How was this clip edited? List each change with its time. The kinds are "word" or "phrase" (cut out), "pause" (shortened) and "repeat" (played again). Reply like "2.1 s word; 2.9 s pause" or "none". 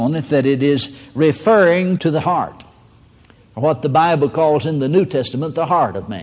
none